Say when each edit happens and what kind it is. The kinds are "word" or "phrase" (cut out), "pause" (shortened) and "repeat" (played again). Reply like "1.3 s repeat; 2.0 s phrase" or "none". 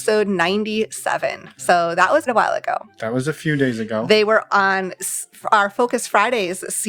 2.3 s word; 4.5 s word